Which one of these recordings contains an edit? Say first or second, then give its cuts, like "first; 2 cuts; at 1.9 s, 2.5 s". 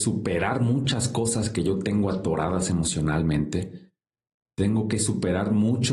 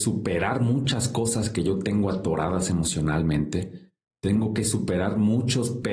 second; 1 cut; at 4.0 s